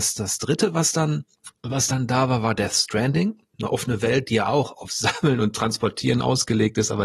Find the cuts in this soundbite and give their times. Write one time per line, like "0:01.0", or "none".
none